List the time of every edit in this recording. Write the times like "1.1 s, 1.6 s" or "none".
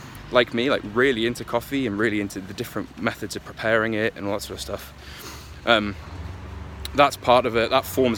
none